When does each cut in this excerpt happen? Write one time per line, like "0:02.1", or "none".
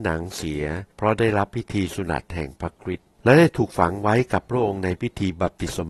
0:00.9
0:03.1